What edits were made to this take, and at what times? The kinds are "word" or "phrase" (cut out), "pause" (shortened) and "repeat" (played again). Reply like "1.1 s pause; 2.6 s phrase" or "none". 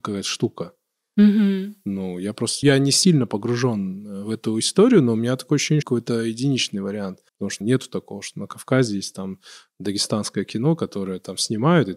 2.6 s word; 5.8 s phrase; 7.3 s pause; 7.6 s word